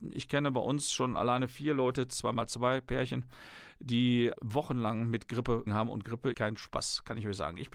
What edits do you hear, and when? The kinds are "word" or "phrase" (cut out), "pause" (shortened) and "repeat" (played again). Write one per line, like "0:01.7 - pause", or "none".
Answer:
0:04.3 - word
0:05.7 - word
0:06.3 - word